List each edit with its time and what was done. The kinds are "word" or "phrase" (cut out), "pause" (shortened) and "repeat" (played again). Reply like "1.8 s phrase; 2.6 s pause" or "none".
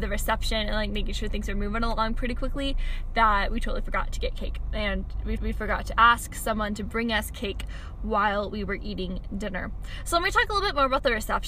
5.4 s repeat